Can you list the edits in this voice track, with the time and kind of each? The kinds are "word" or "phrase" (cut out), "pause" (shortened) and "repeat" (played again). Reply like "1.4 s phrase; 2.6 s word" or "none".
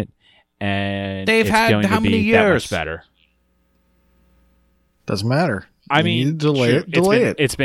none